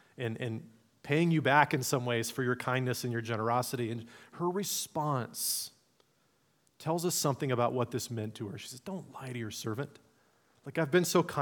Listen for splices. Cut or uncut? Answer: uncut